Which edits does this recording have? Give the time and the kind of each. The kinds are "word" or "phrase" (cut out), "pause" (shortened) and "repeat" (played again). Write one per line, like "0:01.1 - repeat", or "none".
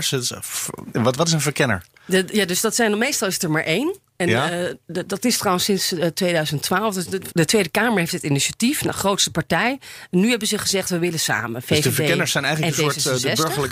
0:01.2 - word
0:07.3 - word